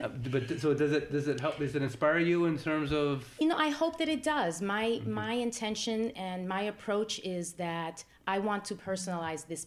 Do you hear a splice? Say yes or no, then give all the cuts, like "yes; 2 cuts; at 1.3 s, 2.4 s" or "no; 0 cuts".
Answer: no; 0 cuts